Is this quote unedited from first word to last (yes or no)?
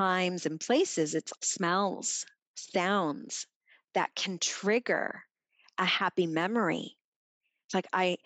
no